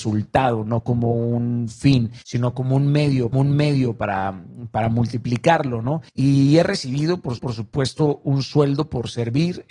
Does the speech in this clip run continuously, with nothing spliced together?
no; 4 cuts; at 2.2 s, 3.3 s, 6.1 s, 7.4 s

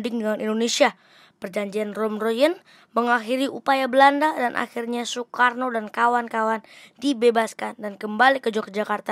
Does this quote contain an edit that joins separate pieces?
no; 0 cuts

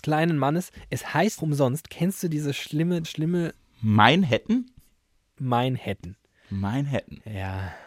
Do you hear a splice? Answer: yes; 2 cuts; at 1.4 s, 3.0 s

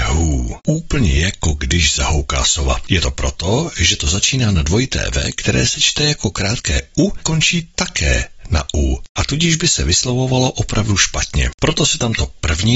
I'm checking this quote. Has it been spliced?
yes; 1 cut; at 7.2 s

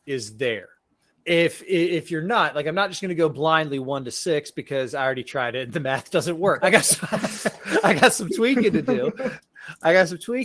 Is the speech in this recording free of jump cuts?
no; 2 cuts; at 1.1 s, 6.6 s

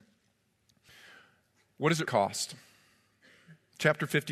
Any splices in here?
yes; 1 cut; at 2.1 s

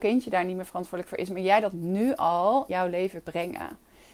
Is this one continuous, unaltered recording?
no; 2 cuts; at 2.7 s, 3.2 s

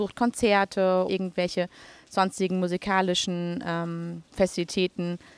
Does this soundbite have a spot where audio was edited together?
yes; 1 cut; at 1.1 s

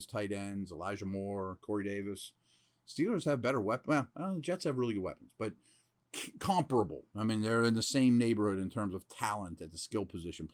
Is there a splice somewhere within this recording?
no; 0 cuts

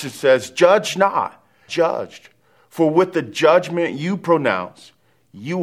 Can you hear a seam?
yes; 1 cut; at 1.7 s

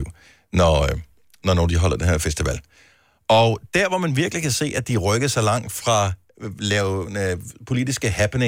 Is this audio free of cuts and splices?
yes; 0 cuts

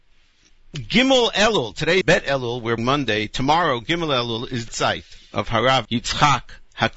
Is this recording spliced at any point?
yes; 4 cuts; at 2.0 s, 2.8 s, 4.7 s, 5.8 s

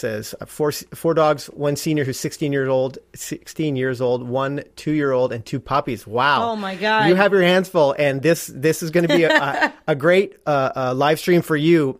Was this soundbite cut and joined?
no; 0 cuts

